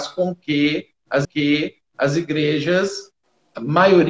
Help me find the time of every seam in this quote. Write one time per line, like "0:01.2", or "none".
0:01.2